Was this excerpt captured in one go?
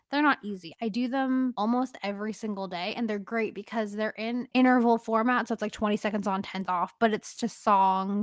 no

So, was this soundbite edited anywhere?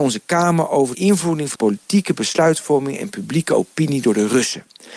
yes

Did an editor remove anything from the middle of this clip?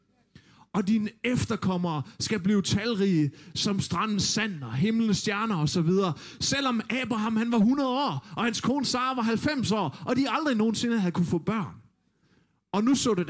no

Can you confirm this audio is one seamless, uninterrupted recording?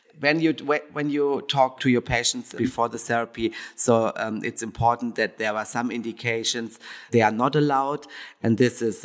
yes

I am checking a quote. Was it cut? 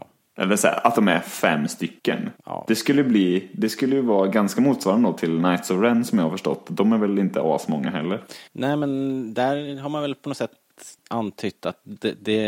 yes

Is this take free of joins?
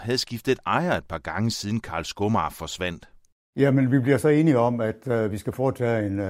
yes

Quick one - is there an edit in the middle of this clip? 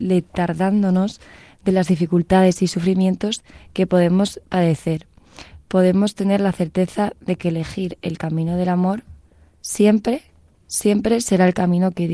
no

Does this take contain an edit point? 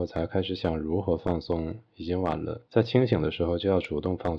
yes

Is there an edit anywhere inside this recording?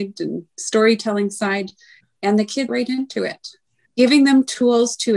yes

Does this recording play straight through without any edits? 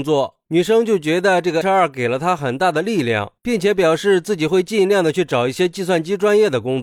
no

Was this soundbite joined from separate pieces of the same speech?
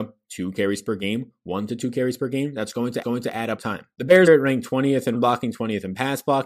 yes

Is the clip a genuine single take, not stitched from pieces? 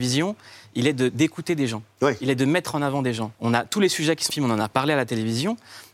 no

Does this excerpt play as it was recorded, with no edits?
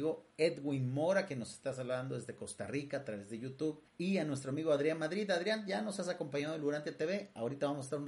no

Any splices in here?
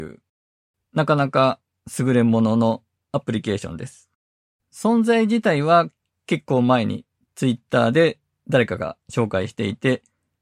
no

